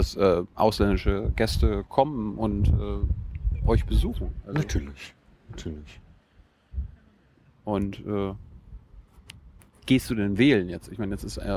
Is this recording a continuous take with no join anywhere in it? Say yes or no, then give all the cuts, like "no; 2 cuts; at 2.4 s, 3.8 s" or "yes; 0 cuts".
yes; 0 cuts